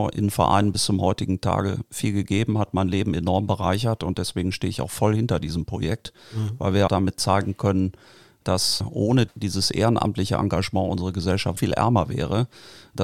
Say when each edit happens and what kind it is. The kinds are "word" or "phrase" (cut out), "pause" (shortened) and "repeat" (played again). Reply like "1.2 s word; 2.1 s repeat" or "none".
6.9 s word; 11.6 s word